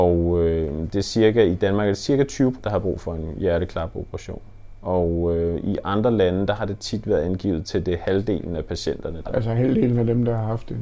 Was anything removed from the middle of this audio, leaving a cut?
yes; 2 cuts; at 2.6 s, 9.3 s

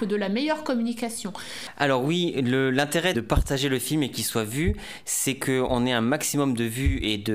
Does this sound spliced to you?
yes; 1 cut; at 3.1 s

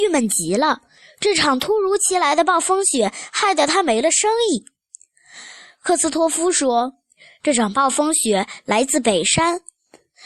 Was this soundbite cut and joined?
no; 0 cuts

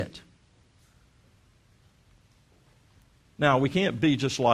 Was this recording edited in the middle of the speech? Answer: no; 0 cuts

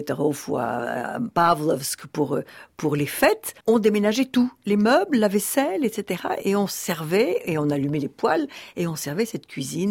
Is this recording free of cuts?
no; 1 cut; at 3.6 s

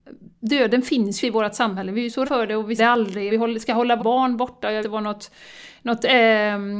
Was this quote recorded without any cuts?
no; 6 cuts; at 1.2 s, 2.2 s, 2.8 s, 3.3 s, 4.0 s, 4.8 s

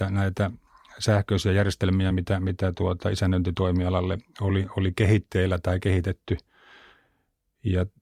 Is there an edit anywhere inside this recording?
no; 0 cuts

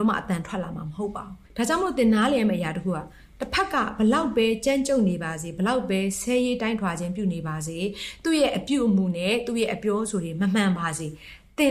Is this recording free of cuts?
no; 1 cut; at 1.4 s

